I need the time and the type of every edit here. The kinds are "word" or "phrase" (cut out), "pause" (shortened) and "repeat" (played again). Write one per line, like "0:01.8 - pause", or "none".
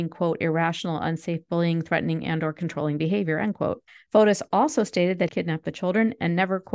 0:03.9 - pause
0:05.3 - phrase